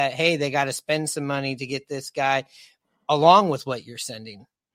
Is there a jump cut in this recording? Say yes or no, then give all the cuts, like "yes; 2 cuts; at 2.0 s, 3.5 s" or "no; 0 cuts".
no; 0 cuts